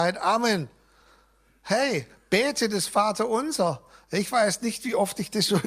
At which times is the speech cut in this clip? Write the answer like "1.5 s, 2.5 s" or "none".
none